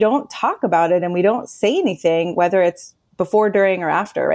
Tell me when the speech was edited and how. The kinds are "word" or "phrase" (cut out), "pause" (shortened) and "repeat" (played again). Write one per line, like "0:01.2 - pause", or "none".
none